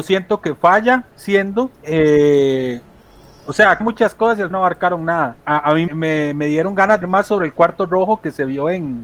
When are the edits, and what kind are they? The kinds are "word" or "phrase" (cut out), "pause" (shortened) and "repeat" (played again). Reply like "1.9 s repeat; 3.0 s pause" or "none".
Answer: 1.7 s pause; 3.8 s phrase; 4.5 s word; 5.4 s pause; 5.9 s word; 7.0 s phrase